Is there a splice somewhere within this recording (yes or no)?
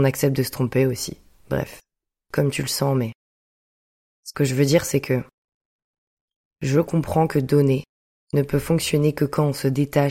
no